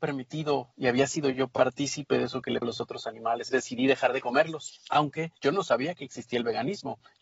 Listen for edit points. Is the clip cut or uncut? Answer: cut